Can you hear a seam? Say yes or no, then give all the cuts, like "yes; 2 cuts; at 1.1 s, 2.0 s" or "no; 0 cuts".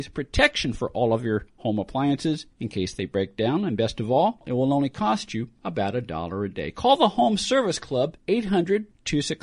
yes; 1 cut; at 8.2 s